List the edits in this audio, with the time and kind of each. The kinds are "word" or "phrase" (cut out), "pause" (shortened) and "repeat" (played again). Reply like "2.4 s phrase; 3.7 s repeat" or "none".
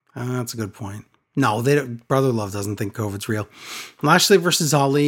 none